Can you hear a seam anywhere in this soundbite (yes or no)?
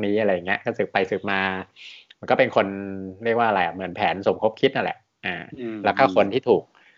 no